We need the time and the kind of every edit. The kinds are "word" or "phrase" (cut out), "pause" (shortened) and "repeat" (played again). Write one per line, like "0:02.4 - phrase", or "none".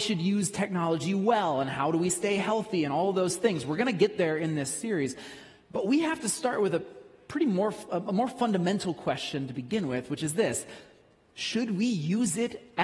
none